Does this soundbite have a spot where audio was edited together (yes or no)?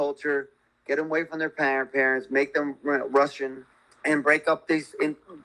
yes